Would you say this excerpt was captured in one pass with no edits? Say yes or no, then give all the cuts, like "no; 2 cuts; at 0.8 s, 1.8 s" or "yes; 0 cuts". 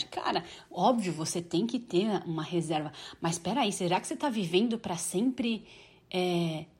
yes; 0 cuts